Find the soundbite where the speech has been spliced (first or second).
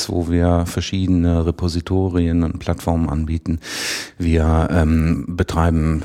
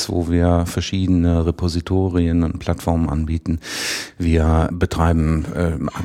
second